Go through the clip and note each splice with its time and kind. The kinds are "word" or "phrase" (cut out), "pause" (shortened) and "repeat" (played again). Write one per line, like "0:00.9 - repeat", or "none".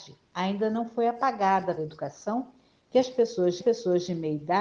0:01.8 - word
0:03.6 - repeat